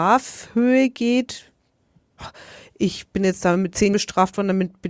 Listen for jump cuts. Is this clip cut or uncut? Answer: cut